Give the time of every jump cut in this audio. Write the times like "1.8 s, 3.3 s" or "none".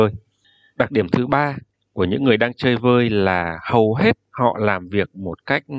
none